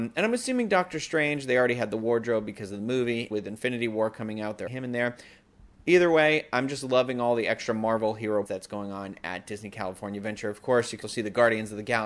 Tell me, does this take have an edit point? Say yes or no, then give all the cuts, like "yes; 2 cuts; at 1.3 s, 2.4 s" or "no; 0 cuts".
yes; 4 cuts; at 3.3 s, 4.7 s, 8.5 s, 11.0 s